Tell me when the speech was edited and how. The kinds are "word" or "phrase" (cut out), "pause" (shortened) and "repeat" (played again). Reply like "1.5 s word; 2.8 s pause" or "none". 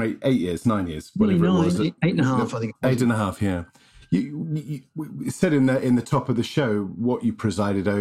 none